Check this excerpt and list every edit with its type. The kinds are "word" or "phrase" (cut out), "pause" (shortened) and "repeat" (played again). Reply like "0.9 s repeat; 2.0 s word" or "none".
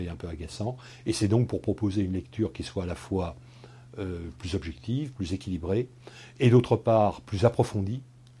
none